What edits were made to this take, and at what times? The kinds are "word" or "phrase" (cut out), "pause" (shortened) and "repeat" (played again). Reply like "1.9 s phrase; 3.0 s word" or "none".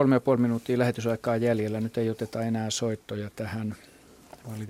none